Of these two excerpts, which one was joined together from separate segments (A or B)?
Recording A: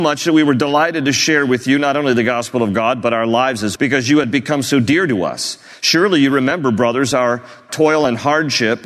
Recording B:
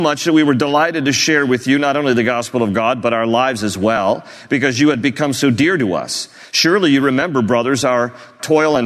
A